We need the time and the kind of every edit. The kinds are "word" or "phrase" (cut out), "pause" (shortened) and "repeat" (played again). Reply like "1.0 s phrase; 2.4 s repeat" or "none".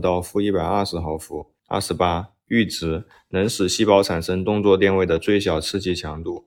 1.6 s pause